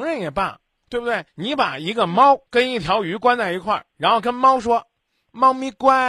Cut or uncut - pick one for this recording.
cut